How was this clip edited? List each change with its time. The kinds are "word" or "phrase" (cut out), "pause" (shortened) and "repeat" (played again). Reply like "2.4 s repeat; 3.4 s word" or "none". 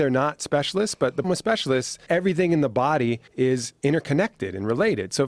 1.2 s word; 2.1 s word; 3.3 s pause